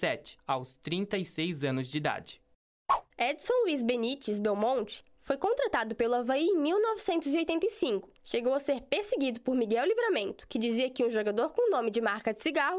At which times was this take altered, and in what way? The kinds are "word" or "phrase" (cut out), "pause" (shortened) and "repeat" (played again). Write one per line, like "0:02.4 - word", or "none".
0:03.1 - pause

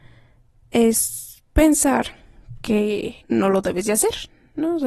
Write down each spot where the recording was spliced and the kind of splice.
0:01.5 - pause
0:03.2 - pause

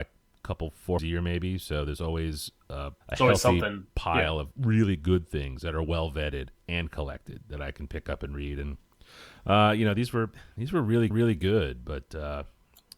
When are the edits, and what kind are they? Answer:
0:01.0 - phrase
0:03.0 - pause
0:11.1 - repeat

